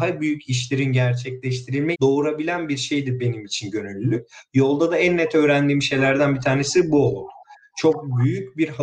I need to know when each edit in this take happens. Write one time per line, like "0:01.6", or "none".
0:01.9